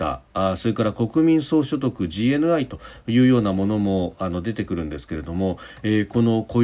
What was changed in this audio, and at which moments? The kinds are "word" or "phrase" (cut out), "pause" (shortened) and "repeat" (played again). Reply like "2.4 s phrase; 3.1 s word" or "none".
none